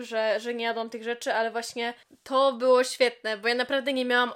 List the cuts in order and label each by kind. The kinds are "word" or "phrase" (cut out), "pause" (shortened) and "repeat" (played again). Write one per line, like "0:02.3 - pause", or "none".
0:02.1 - pause